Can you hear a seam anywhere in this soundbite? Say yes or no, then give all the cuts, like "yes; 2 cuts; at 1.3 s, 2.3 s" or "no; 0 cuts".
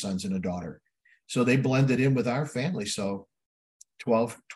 no; 0 cuts